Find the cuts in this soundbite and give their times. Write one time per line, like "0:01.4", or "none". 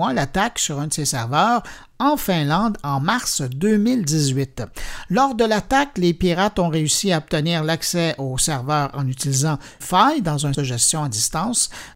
0:09.8
0:10.5